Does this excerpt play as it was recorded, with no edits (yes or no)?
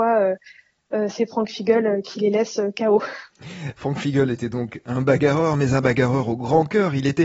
yes